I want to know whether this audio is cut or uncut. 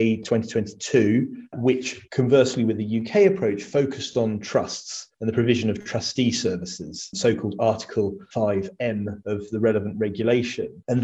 cut